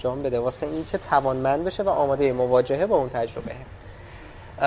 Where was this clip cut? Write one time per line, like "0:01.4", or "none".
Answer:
none